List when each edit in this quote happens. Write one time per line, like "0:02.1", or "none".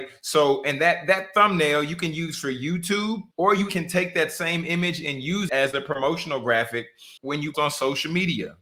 0:03.3
0:03.7
0:05.5
0:07.2
0:07.5